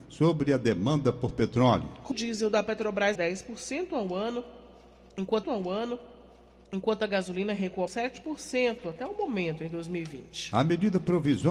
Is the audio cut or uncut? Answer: cut